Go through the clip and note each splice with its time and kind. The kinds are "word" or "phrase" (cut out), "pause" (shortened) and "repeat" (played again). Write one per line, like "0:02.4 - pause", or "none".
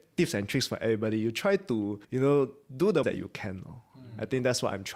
0:02.0 - pause
0:03.0 - word

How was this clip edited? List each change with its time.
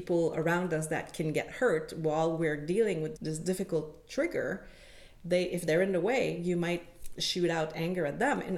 0:03.1 - word

